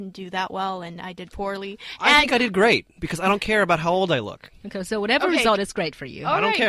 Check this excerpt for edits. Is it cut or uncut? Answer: uncut